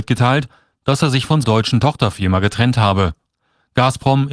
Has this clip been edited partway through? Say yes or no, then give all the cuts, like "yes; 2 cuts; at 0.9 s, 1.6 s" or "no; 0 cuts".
yes; 1 cut; at 1.4 s